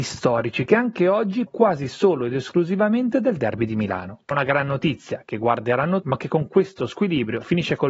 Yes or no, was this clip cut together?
yes